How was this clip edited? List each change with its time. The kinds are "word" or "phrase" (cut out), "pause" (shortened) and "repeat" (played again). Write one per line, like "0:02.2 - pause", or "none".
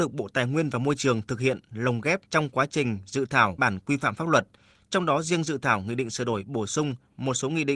0:02.3 - pause
0:03.6 - phrase